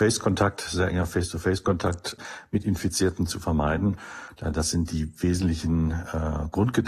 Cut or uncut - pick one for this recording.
uncut